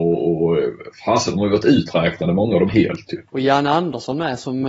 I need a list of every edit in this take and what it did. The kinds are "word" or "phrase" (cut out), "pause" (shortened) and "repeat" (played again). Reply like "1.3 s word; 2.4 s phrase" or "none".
2.7 s phrase; 3.3 s pause